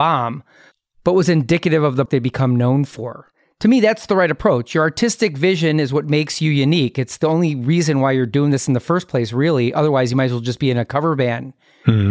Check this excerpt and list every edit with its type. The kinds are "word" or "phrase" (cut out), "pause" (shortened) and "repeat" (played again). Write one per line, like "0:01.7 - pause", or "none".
0:02.1 - phrase